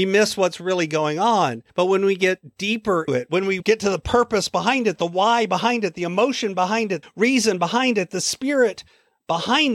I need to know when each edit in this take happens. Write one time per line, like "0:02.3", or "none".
0:01.7
0:03.1
0:03.6
0:07.0